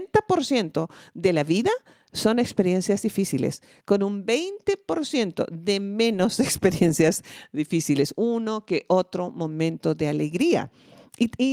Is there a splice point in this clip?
no; 0 cuts

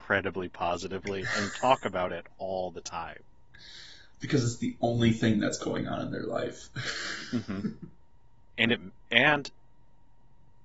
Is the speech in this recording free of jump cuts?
yes; 0 cuts

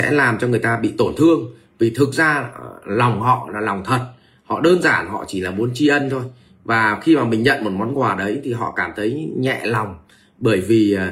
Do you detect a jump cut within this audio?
no; 0 cuts

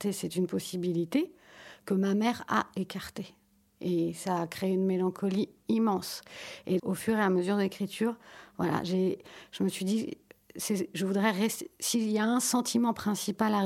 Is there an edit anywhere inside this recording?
yes; 1 cut; at 6.8 s

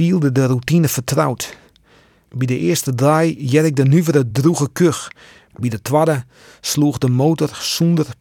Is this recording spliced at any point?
no; 0 cuts

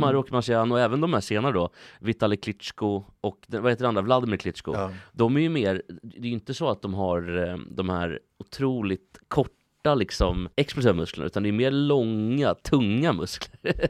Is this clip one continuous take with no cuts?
no; 1 cut; at 10.5 s

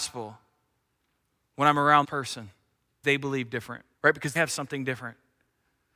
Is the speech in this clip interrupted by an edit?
yes; 4 cuts; at 2.0 s, 3.0 s, 3.9 s, 4.4 s

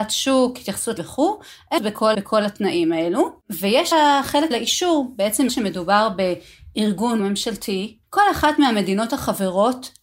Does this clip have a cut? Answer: yes; 8 cuts; at 1.0 s, 1.8 s, 2.1 s, 3.9 s, 4.5 s, 5.5 s, 7.2 s, 8.0 s

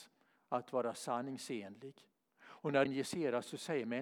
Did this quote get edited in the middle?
yes; 2 cuts; at 2.1 s, 2.9 s

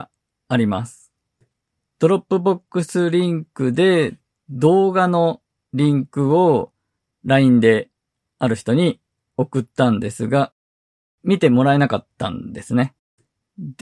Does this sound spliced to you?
no; 0 cuts

